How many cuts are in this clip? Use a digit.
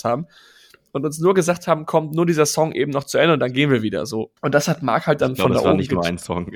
1